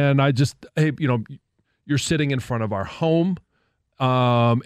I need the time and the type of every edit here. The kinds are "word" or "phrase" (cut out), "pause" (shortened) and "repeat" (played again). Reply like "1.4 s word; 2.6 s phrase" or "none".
none